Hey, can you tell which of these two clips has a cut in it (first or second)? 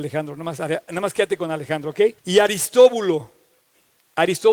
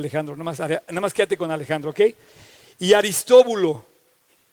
first